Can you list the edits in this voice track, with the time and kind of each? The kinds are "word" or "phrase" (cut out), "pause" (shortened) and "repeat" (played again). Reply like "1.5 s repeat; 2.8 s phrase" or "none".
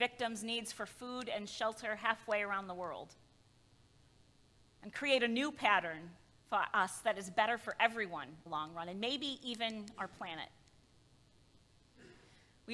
6.3 s pause; 8.5 s phrase